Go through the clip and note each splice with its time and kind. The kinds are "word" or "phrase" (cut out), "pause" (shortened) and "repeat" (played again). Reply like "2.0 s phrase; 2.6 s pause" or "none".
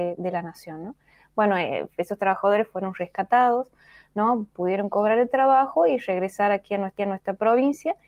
7.0 s repeat